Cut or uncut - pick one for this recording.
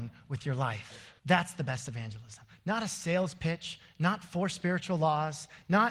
cut